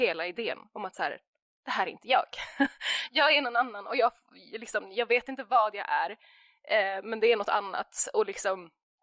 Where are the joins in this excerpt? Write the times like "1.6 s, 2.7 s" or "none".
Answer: none